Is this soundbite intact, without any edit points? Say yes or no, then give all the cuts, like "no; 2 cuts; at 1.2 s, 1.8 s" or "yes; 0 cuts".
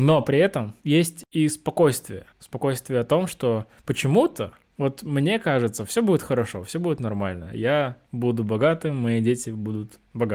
no; 1 cut; at 2.3 s